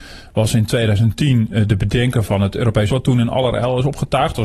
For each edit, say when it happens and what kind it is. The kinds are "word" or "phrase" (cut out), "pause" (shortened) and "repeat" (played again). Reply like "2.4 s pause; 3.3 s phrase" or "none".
2.9 s word